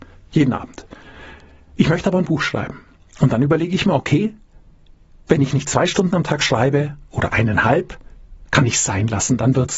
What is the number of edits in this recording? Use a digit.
0